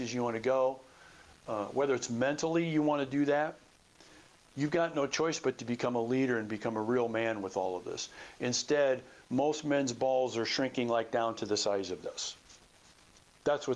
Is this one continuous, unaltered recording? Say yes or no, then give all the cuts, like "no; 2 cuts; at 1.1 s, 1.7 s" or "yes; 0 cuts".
yes; 0 cuts